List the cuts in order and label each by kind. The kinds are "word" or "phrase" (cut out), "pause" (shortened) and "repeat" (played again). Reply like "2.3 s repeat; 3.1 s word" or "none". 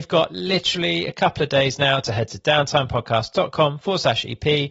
none